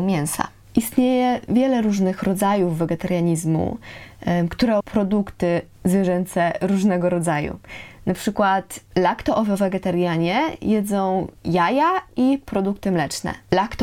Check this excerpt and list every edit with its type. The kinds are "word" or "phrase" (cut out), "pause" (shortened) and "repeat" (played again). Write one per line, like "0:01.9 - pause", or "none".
0:04.8 - word
0:11.4 - pause